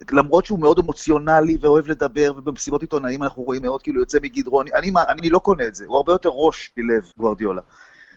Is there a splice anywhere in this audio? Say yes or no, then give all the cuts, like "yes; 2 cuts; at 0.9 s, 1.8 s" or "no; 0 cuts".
yes; 3 cuts; at 3.6 s, 5.2 s, 7.1 s